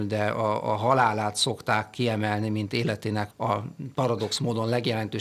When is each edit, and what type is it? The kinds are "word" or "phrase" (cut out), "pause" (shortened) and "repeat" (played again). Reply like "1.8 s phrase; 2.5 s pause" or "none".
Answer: 3.3 s word